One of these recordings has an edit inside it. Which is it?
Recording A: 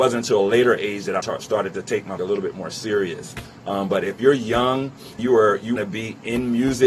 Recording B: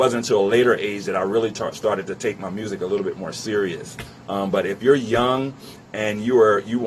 A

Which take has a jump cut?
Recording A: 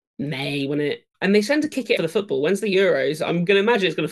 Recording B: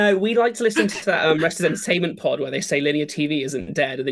A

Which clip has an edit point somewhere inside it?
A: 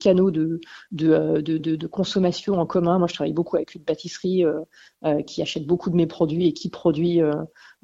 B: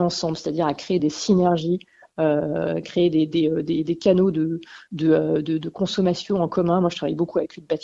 A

